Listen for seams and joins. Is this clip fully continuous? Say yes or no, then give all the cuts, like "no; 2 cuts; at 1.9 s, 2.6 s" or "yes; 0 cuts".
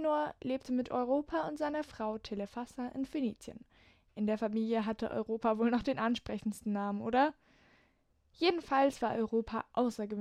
yes; 0 cuts